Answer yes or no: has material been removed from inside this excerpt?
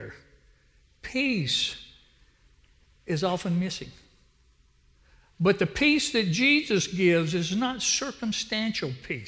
no